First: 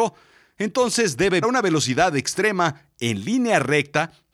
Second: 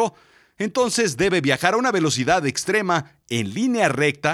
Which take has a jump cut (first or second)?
first